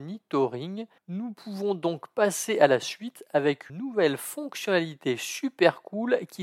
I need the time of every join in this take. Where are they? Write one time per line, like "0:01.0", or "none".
0:01.0
0:03.7

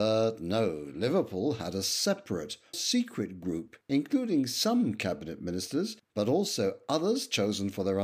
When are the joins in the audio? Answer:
0:02.7
0:03.8
0:06.0

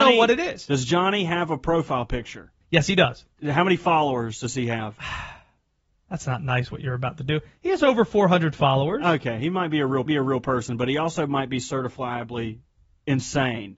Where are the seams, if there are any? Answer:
0:02.6
0:10.1

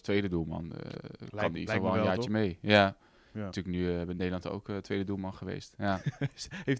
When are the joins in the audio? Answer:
0:01.7
0:03.5
0:04.4

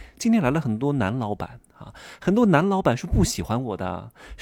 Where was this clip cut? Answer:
0:01.7

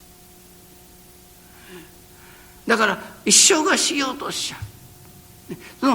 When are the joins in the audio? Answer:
none

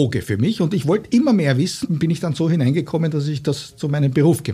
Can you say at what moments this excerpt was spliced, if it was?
0:01.8

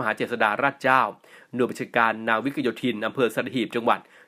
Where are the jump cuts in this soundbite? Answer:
none

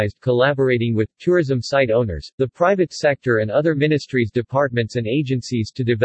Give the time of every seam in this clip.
none

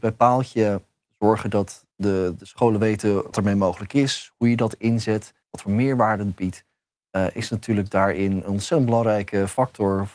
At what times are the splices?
0:01.9
0:03.3
0:05.4

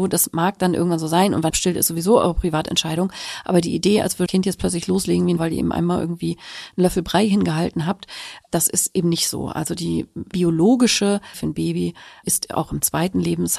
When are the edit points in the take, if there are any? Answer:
0:01.5
0:04.3
0:05.4
0:08.5
0:10.3
0:11.3
0:12.2

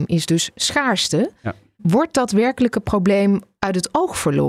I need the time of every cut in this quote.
none

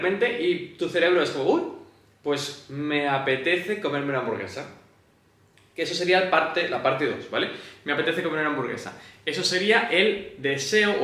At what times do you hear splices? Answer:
none

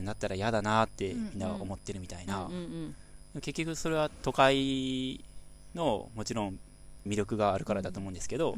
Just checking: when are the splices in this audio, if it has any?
0:07.1

